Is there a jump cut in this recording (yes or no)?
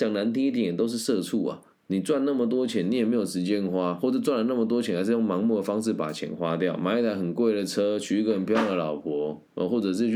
yes